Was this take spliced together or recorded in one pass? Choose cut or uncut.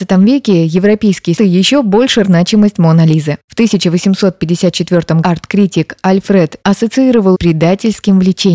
cut